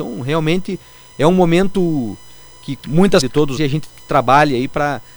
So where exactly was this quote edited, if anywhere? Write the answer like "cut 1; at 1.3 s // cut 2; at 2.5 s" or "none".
cut 1; at 2.8 s // cut 2; at 3.2 s // cut 3; at 3.6 s